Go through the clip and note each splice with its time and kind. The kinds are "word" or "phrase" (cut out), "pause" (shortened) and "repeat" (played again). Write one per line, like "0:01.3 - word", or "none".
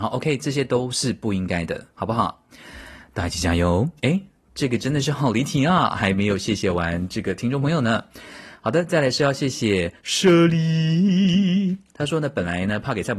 0:04.0 - pause
0:10.0 - pause
0:11.9 - pause